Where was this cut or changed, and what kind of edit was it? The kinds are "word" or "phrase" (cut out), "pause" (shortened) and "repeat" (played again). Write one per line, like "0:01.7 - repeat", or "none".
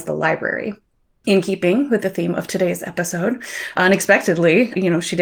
none